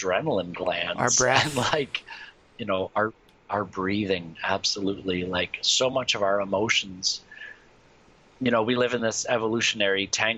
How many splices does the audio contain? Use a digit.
0